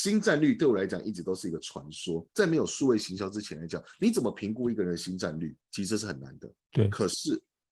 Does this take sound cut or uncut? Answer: cut